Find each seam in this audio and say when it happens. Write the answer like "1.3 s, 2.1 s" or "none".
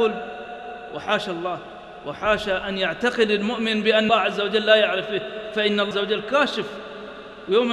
4.1 s, 5.9 s